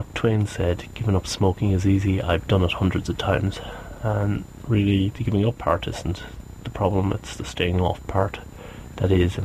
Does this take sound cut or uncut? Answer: uncut